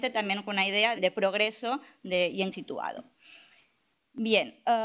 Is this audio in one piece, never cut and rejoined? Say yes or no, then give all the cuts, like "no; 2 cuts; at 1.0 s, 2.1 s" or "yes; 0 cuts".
no; 2 cuts; at 1.0 s, 2.5 s